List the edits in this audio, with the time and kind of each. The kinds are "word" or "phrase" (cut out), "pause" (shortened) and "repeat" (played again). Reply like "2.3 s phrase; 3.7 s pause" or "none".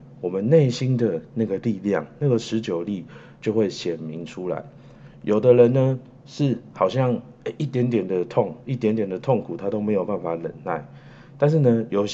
8.6 s pause